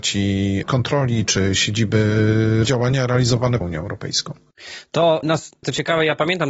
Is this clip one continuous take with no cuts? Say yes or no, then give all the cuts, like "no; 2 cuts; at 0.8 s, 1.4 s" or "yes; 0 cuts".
no; 2 cuts; at 2.6 s, 3.6 s